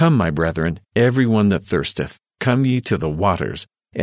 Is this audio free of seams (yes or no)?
yes